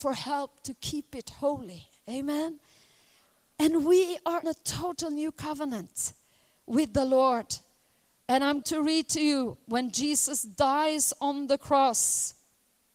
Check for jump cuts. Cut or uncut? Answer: cut